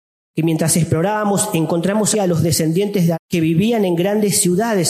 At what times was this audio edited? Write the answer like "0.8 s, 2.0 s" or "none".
2.1 s, 3.1 s

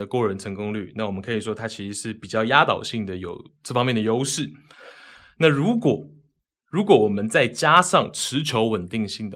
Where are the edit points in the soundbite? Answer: none

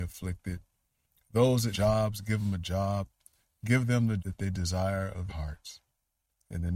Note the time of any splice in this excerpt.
1.7 s, 4.2 s, 5.3 s

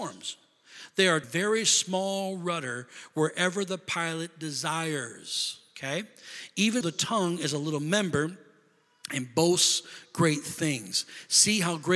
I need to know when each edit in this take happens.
1.2 s, 6.8 s

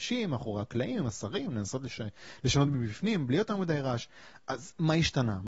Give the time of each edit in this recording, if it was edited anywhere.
none

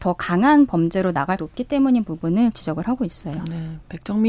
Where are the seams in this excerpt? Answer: 1.4 s

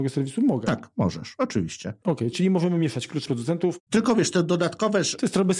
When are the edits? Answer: 2.3 s, 3.3 s

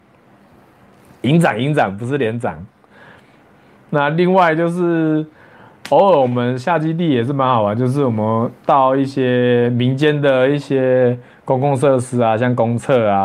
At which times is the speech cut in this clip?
none

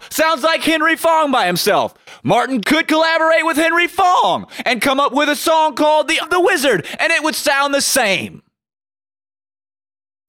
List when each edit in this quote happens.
2.6 s, 6.2 s

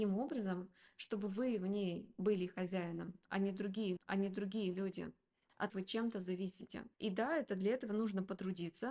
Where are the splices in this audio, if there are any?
4.0 s, 5.7 s, 6.9 s

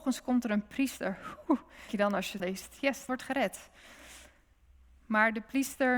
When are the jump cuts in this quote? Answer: 1.9 s, 2.4 s, 3.1 s

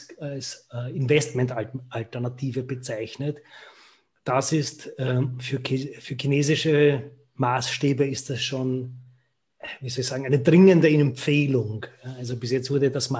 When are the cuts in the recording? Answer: none

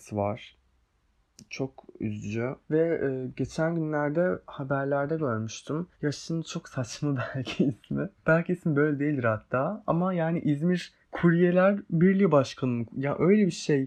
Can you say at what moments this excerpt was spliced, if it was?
2.6 s, 5.9 s, 8.2 s, 11.0 s

